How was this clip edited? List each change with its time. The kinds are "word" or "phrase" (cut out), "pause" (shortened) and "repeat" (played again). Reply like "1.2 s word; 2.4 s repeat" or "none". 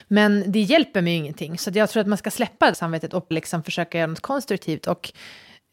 2.7 s word; 3.3 s word